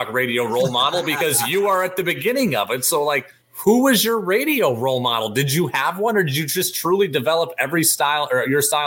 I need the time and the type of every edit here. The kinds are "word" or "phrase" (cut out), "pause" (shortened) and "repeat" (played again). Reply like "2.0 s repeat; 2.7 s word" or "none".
3.4 s pause

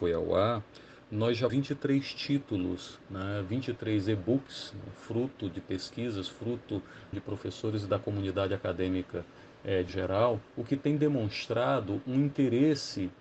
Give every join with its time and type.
1.5 s word; 7.1 s phrase; 9.9 s word; 10.5 s pause

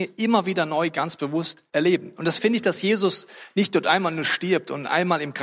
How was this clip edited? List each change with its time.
1.7 s pause; 2.4 s word

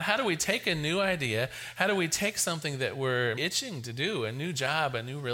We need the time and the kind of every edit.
3.4 s word

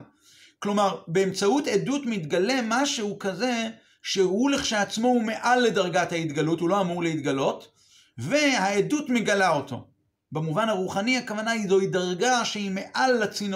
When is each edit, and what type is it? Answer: none

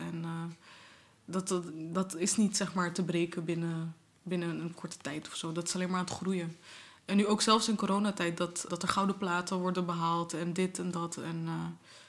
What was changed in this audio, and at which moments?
8.7 s word

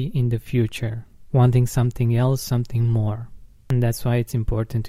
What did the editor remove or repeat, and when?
none

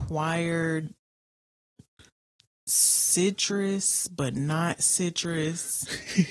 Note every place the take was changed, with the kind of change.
none

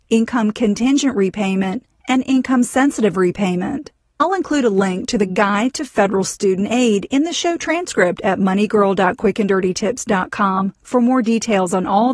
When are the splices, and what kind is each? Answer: none

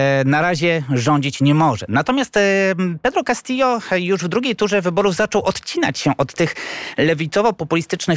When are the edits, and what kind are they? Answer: none

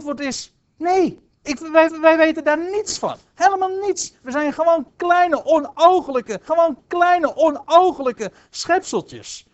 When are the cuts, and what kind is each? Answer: 1.9 s repeat; 6.5 s repeat

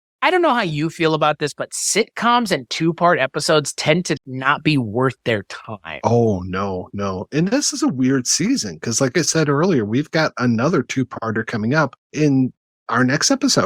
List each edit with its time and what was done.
4.2 s word; 12.0 s pause

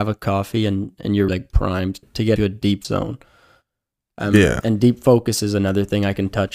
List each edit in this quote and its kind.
1.3 s word; 2.0 s word; 2.4 s word; 2.8 s word

